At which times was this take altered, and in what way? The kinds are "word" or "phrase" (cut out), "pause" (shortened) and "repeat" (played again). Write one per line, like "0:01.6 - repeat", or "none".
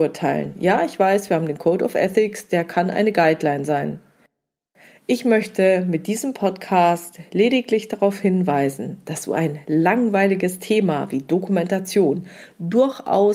none